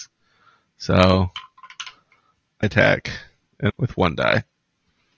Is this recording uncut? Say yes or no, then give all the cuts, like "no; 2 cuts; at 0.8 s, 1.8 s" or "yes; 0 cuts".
no; 2 cuts; at 2.6 s, 3.7 s